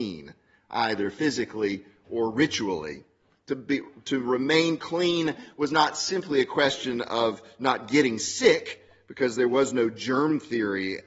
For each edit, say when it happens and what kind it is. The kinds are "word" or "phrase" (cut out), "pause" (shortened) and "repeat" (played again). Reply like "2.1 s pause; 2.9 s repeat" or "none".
none